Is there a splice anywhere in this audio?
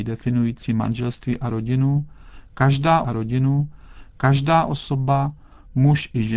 yes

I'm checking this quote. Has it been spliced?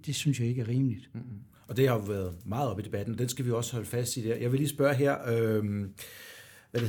no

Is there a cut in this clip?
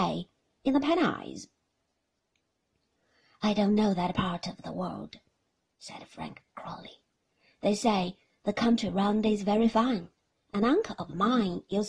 no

